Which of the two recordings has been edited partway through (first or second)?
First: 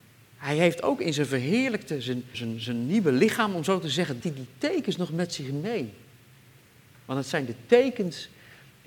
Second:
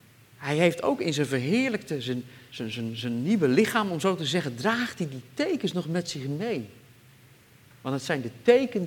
first